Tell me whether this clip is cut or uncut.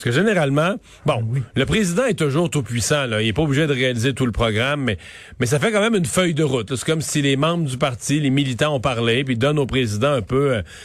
uncut